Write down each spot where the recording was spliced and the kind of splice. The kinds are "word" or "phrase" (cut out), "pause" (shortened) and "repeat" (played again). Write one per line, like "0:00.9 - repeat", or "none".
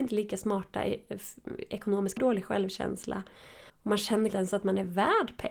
0:02.2 - phrase
0:03.7 - pause
0:04.3 - phrase